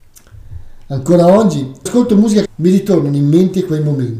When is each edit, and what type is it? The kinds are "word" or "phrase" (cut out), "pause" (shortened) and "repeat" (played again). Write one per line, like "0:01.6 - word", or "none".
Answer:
0:01.9 - word
0:02.5 - word